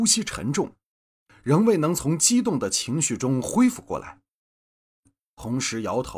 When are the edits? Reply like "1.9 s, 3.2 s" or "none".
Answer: none